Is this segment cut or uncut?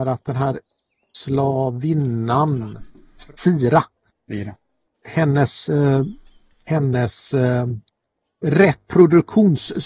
uncut